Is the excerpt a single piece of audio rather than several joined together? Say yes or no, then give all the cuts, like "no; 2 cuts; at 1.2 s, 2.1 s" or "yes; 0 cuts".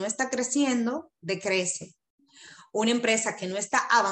yes; 0 cuts